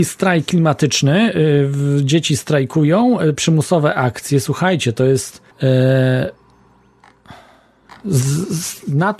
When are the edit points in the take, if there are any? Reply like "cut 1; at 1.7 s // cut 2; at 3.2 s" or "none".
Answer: cut 1; at 5.5 s